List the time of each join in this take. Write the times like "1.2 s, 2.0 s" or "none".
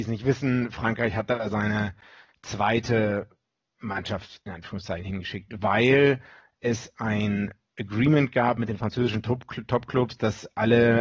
none